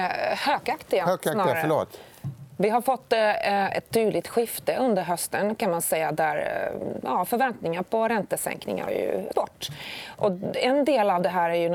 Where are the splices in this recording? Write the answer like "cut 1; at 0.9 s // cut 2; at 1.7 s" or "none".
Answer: cut 1; at 8.9 s // cut 2; at 9.3 s